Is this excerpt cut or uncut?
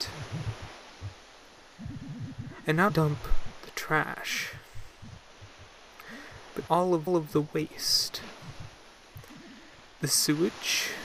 cut